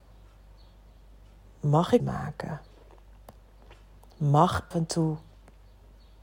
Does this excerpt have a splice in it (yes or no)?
yes